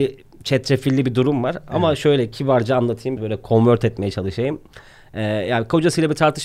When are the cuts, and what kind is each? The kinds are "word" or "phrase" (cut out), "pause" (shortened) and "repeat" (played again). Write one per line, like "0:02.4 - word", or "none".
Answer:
0:03.2 - word